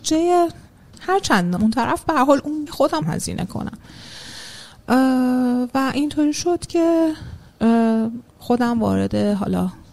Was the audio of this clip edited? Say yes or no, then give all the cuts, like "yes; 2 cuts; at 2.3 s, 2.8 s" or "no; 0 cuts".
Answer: yes; 4 cuts; at 1.6 s, 2.7 s, 3.0 s, 8.3 s